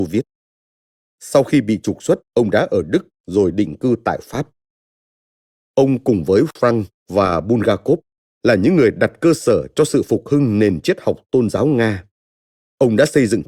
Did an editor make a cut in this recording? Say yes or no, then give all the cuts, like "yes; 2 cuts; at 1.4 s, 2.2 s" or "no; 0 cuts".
yes; 1 cut; at 2.2 s